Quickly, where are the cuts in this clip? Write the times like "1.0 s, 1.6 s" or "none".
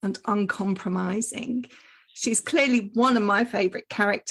none